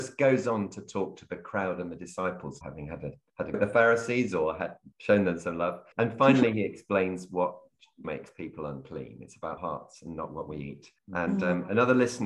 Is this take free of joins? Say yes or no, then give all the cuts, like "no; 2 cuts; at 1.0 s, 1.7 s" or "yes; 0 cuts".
no; 7 cuts; at 2.6 s, 3.5 s, 4.9 s, 5.9 s, 8.0 s, 9.6 s, 11.0 s